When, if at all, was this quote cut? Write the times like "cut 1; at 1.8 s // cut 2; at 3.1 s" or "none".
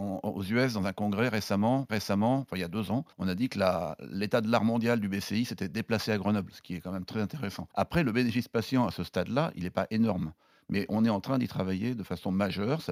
cut 1; at 1.9 s // cut 2; at 3.1 s // cut 3; at 7.7 s